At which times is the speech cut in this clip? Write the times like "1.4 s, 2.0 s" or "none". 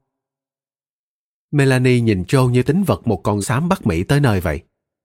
2.6 s, 3.4 s